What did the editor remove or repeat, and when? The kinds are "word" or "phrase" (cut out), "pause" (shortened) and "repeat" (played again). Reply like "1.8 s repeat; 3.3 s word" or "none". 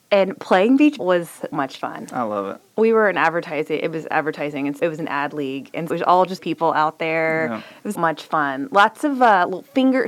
1.0 s word; 1.5 s word; 4.8 s word; 5.9 s word; 6.4 s word; 8.0 s word